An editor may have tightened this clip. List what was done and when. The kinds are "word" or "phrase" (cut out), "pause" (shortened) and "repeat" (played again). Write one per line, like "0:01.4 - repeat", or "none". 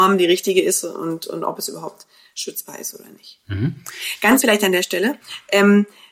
0:04.4 - word